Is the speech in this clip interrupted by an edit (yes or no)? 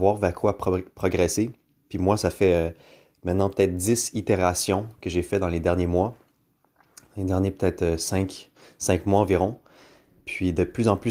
no